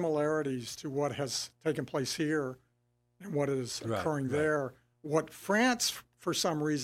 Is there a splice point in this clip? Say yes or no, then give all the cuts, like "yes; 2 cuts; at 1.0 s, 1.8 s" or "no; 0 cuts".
no; 0 cuts